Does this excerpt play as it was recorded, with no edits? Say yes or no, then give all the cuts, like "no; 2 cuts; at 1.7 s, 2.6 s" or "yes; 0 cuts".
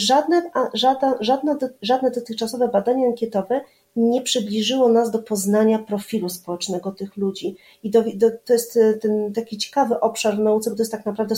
yes; 0 cuts